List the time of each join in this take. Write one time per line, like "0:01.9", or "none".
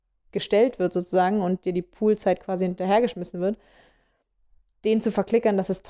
none